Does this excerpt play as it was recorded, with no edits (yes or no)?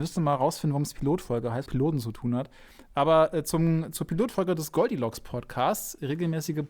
no